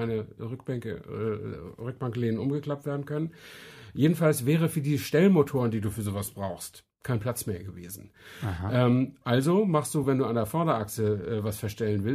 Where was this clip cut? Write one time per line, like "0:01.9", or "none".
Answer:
none